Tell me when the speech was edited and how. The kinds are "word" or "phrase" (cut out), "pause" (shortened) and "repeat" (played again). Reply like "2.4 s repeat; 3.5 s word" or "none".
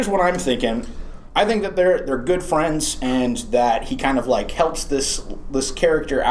none